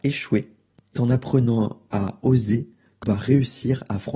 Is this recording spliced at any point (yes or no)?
yes